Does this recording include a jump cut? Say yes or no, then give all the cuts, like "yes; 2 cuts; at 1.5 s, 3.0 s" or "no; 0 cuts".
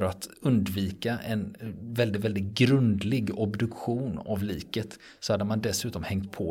no; 0 cuts